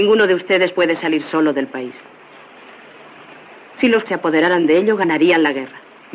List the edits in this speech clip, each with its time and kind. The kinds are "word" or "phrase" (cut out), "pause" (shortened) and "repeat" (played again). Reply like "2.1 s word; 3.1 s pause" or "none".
4.1 s word